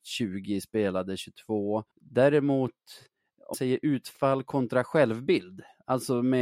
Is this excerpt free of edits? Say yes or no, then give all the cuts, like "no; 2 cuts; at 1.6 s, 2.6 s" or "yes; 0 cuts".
no; 2 cuts; at 1.9 s, 3.5 s